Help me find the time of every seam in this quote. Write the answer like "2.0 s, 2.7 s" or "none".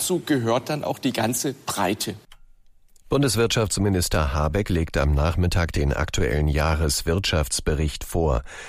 none